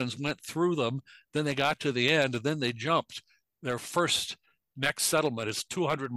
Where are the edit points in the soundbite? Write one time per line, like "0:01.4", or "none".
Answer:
none